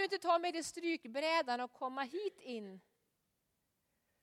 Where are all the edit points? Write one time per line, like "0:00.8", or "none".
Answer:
none